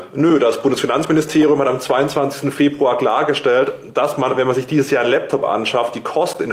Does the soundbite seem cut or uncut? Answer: uncut